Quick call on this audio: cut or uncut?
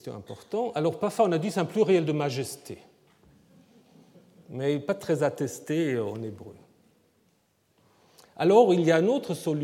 uncut